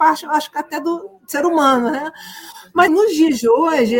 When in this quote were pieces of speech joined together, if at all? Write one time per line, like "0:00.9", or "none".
0:02.9